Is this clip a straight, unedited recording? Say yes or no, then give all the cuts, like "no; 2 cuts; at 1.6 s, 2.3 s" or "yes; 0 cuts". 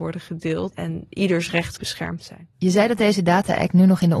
no; 3 cuts; at 1.1 s, 1.8 s, 3.1 s